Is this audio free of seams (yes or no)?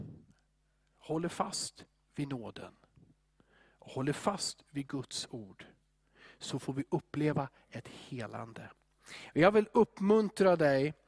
yes